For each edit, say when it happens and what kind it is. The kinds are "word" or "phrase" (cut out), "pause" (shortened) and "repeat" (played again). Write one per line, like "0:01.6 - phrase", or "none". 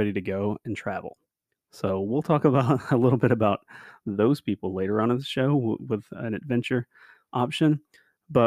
0:05.8 - word